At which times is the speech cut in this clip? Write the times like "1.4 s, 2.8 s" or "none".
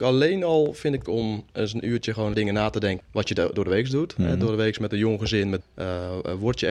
1.1 s, 1.5 s, 2.3 s, 3.0 s, 5.6 s